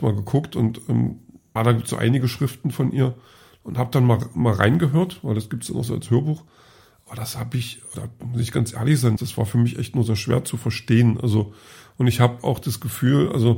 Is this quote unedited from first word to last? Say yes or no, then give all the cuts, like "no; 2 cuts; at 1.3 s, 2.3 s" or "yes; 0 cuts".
no; 3 cuts; at 1.6 s, 7.9 s, 9.2 s